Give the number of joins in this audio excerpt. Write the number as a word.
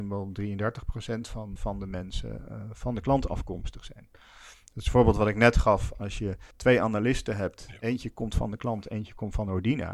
two